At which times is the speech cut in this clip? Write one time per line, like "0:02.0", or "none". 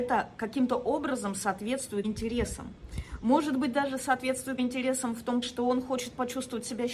0:02.0
0:04.6
0:05.4